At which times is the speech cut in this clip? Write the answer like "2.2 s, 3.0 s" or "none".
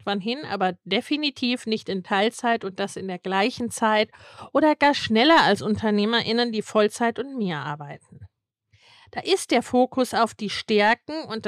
none